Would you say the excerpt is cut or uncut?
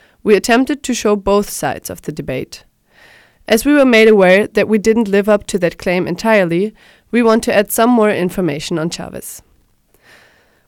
uncut